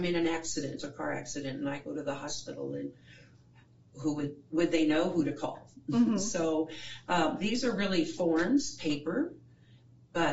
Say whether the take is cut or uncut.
uncut